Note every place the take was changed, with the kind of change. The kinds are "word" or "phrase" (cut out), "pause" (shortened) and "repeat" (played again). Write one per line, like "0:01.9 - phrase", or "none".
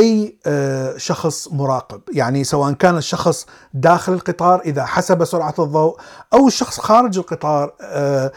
none